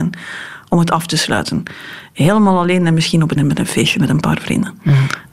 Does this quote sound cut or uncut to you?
cut